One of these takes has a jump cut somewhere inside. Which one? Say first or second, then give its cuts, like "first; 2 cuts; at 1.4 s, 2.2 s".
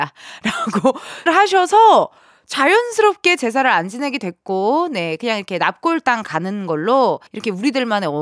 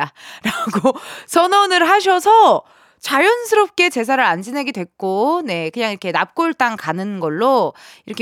first; 2 cuts; at 1.3 s, 7.3 s